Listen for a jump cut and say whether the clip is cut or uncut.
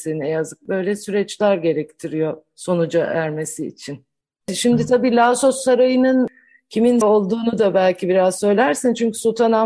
cut